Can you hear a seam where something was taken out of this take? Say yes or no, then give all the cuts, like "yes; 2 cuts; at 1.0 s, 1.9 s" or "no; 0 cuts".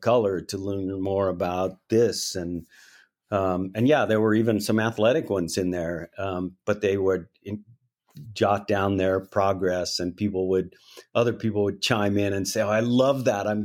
no; 0 cuts